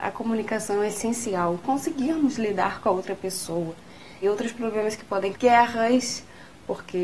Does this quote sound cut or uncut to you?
cut